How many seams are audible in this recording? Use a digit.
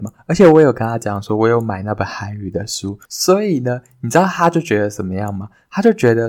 1